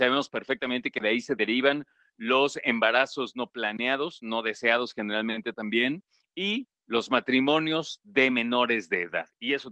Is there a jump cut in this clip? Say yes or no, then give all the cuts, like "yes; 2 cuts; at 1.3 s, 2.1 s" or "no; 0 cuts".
no; 0 cuts